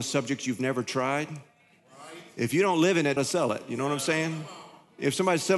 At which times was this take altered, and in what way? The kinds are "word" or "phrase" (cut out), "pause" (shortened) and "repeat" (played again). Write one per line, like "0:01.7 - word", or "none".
0:03.2 - phrase